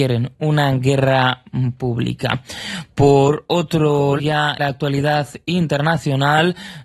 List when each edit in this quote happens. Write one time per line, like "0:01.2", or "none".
0:04.2
0:04.6